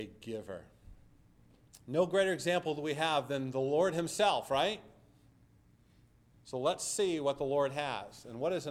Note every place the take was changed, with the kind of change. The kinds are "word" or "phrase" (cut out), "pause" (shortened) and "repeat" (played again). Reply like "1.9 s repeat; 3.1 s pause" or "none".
none